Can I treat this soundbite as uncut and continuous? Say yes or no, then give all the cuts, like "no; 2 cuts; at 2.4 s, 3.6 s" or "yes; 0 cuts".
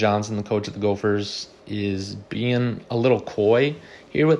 yes; 0 cuts